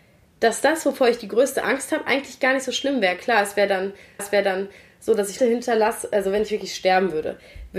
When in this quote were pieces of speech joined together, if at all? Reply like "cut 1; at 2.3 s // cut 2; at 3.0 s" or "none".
cut 1; at 4.2 s // cut 2; at 5.4 s